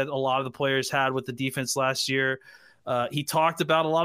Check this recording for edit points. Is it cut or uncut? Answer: uncut